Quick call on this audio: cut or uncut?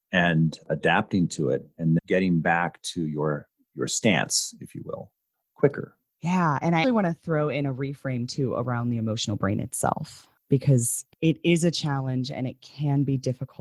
cut